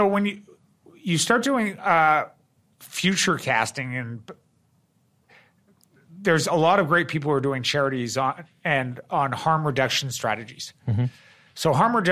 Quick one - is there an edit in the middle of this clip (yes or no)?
no